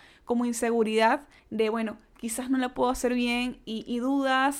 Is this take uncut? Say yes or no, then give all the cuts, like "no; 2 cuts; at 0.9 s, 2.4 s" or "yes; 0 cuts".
no; 1 cut; at 1.4 s